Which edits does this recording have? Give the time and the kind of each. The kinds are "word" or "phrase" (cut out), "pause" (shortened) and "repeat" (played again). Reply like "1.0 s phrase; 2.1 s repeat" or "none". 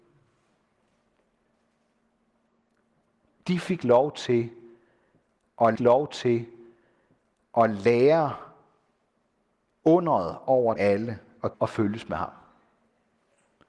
5.7 s repeat; 10.7 s word; 11.5 s word